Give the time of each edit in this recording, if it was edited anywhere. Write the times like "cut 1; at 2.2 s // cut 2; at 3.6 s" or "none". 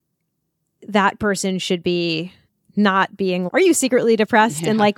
cut 1; at 2.5 s // cut 2; at 3.5 s